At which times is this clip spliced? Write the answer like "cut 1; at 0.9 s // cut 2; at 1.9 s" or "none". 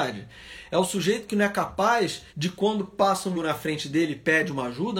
cut 1; at 2.3 s // cut 2; at 3.3 s

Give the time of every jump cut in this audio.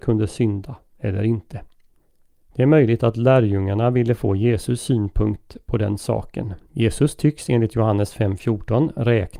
cut 1; at 2.0 s // cut 2; at 6.6 s

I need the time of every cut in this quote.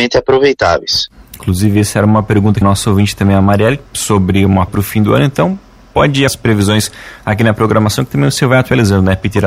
cut 1; at 2.6 s // cut 2; at 3.8 s // cut 3; at 4.7 s // cut 4; at 6.3 s

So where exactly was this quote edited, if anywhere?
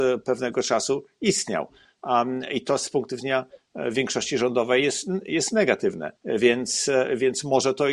cut 1; at 6.2 s

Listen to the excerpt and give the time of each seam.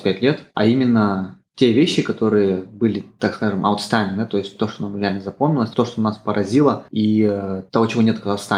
none

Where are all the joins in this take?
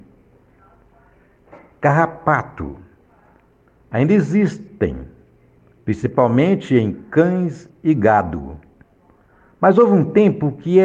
none

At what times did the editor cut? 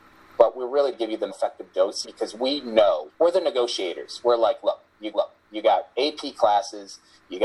cut 1; at 0.9 s // cut 2; at 1.3 s // cut 3; at 2.0 s // cut 4; at 3.1 s // cut 5; at 5.1 s

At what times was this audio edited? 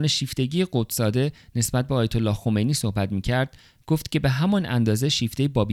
none

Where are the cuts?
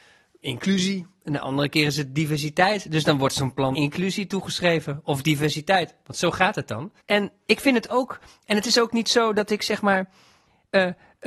cut 1; at 3.7 s // cut 2; at 7.0 s

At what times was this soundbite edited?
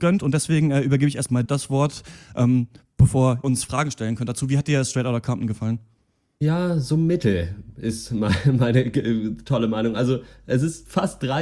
cut 1; at 1.4 s // cut 2; at 3.4 s

